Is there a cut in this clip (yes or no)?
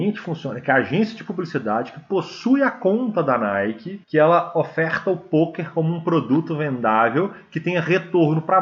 yes